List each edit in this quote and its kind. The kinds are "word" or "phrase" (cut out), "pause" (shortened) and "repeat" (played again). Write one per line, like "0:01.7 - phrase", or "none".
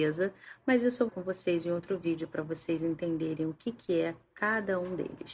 0:01.1 - phrase